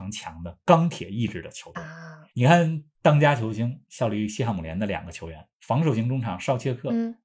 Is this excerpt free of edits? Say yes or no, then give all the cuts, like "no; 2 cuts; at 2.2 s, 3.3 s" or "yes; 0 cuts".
no; 2 cuts; at 2.3 s, 2.9 s